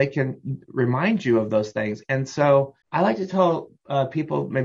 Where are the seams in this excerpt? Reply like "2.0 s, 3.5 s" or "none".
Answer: 2.8 s